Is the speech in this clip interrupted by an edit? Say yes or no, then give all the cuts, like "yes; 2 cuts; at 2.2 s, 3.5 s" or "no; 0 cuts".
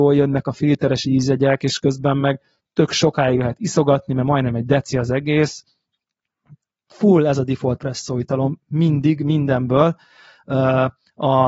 no; 0 cuts